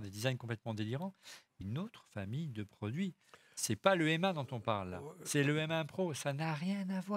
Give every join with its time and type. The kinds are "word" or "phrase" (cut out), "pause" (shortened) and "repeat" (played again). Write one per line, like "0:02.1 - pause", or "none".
0:01.6 - phrase